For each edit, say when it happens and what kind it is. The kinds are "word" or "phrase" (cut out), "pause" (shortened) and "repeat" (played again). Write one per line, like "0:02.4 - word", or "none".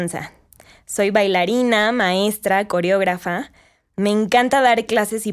none